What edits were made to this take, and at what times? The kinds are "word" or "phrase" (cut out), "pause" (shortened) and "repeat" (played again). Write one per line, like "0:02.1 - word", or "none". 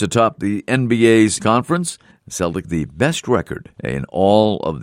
0:01.4 - word
0:02.1 - pause
0:02.6 - word
0:03.7 - pause